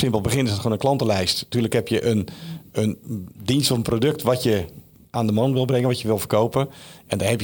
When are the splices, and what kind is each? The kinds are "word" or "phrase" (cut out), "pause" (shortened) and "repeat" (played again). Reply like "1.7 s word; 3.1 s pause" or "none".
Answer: none